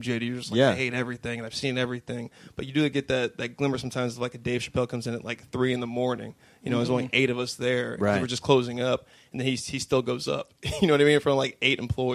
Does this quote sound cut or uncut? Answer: uncut